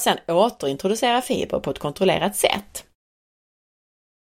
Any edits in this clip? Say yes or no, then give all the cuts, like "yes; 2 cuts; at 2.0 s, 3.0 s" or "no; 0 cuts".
no; 0 cuts